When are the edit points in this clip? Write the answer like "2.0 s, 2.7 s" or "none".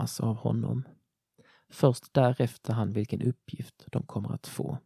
2.7 s